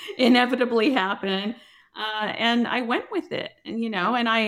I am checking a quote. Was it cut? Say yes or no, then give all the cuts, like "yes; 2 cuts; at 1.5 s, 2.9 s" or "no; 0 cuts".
no; 0 cuts